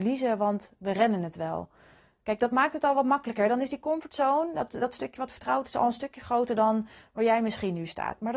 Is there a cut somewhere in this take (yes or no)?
no